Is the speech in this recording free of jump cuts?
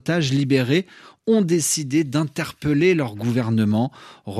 yes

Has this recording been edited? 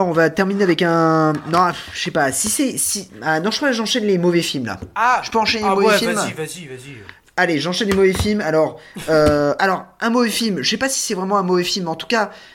no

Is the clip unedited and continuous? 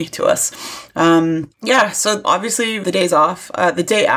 no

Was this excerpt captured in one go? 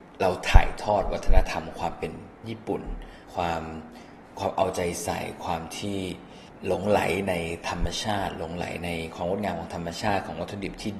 no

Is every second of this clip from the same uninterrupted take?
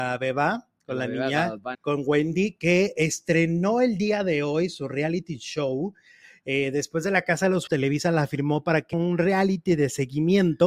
no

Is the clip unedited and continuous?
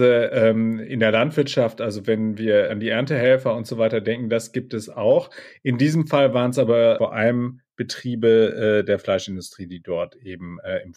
no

